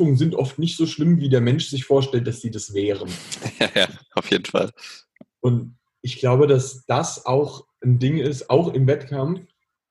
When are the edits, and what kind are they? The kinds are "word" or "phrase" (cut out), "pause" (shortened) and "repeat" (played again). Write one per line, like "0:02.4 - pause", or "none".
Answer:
none